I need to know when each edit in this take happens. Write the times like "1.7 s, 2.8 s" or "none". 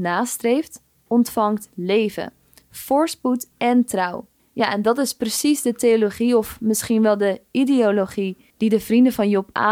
3.5 s, 4.4 s, 8.5 s